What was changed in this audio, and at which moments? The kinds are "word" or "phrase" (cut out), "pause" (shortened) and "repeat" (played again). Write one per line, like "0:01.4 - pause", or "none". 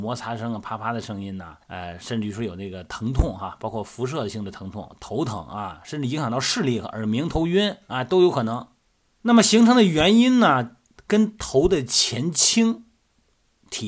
0:01.6 - pause